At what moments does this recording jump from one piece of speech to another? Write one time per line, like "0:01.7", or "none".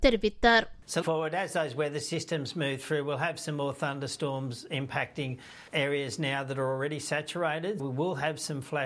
0:01.0
0:05.7
0:07.8